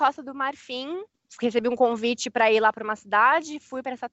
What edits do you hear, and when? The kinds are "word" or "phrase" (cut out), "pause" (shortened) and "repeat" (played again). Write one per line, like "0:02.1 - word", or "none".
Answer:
none